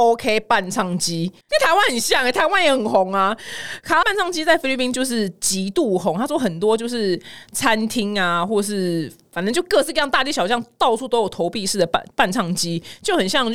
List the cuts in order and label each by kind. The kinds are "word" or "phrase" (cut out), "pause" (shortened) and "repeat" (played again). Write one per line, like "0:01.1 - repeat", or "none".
0:01.4 - pause
0:04.0 - word